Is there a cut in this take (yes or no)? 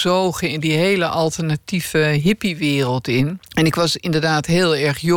yes